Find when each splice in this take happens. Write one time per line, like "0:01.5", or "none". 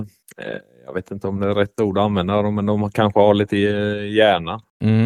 none